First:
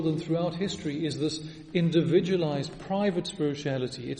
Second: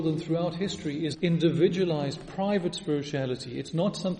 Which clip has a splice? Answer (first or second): second